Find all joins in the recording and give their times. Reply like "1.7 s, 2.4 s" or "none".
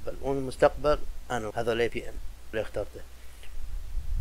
1.5 s, 1.9 s, 2.5 s

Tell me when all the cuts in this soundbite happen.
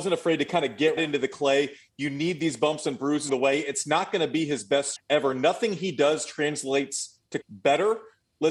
1.0 s, 3.3 s, 5.0 s, 7.4 s

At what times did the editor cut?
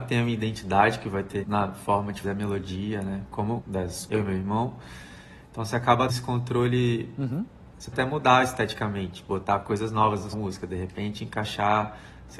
1.4 s, 2.2 s, 3.6 s, 4.1 s, 6.1 s, 7.9 s, 10.3 s

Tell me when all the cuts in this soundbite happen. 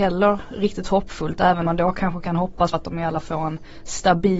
1.7 s, 2.7 s, 3.2 s

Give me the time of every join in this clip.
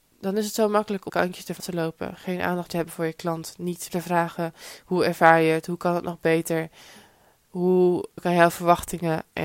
1.1 s, 1.6 s, 2.7 s, 3.9 s, 8.2 s

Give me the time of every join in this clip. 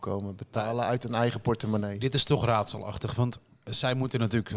none

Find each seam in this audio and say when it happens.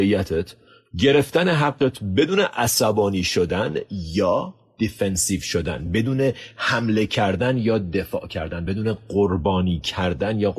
none

